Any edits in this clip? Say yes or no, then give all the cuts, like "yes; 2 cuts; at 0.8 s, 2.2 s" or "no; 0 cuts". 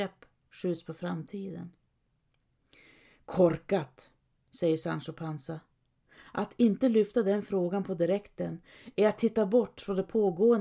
no; 0 cuts